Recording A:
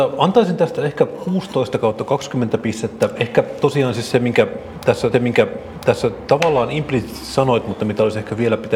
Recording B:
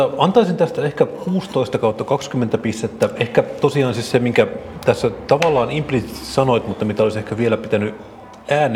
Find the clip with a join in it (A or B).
A